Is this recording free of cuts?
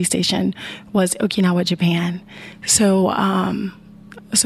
yes; 0 cuts

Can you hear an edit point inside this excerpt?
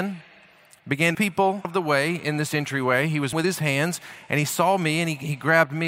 yes; 3 cuts; at 1.1 s, 1.6 s, 3.3 s

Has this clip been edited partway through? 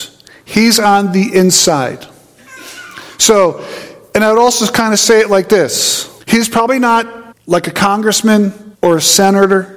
yes; 3 cuts; at 6.2 s, 7.3 s, 8.7 s

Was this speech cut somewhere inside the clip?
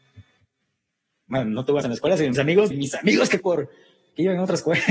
yes; 4 cuts; at 1.8 s, 2.3 s, 2.7 s, 3.4 s

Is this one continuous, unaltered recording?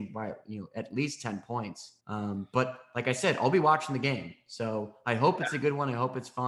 no; 1 cut; at 2.0 s

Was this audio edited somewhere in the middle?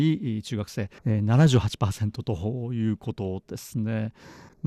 yes; 1 cut; at 1.0 s

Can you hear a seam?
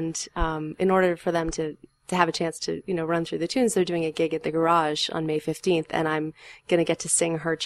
no; 0 cuts

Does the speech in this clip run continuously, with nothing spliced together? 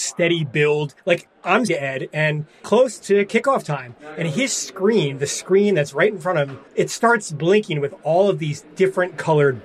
no; 4 cuts; at 1.0 s, 1.7 s, 2.6 s, 6.7 s

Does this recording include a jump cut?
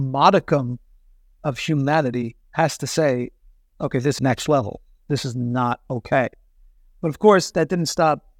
yes; 2 cuts; at 2.4 s, 4.2 s

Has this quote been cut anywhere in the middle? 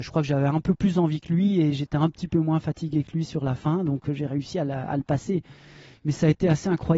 no; 0 cuts

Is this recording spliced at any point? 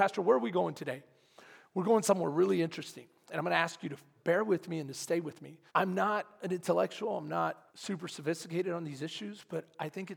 yes; 3 cuts; at 4.2 s, 5.7 s, 7.7 s

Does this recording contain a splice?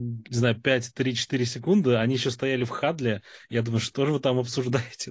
no; 0 cuts

